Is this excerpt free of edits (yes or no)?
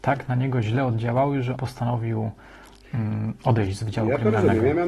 no